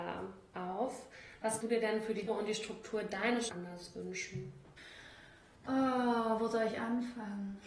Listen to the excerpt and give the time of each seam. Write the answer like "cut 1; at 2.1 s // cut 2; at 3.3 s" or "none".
cut 1; at 1.6 s // cut 2; at 2.3 s // cut 3; at 3.5 s